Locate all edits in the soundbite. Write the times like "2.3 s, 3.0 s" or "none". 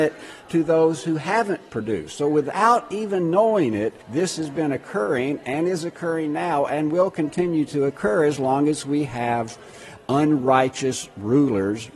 4.0 s